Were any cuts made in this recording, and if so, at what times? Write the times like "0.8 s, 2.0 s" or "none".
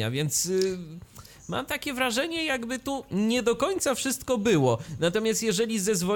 none